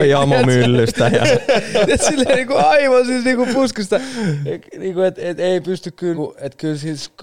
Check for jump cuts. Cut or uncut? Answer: cut